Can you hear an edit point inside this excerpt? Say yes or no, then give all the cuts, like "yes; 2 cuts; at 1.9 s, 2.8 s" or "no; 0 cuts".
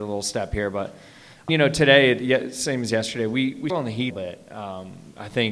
yes; 4 cuts; at 1.5 s, 2.2 s, 3.7 s, 4.1 s